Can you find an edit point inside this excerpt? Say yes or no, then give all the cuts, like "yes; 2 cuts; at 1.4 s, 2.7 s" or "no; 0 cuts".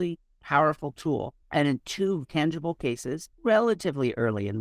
yes; 3 cuts; at 1.4 s, 2.2 s, 3.3 s